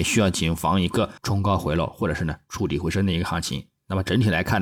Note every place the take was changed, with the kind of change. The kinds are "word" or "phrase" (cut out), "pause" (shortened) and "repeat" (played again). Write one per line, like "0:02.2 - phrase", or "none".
0:01.2 - pause